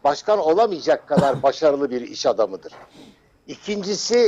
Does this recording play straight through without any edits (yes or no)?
yes